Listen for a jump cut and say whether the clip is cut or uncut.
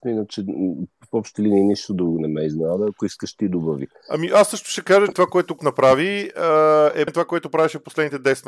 cut